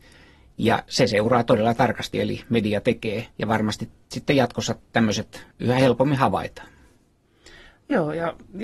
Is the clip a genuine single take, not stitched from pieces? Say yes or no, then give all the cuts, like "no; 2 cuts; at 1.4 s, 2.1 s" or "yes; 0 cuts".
no; 3 cuts; at 2.1 s, 3.3 s, 5.5 s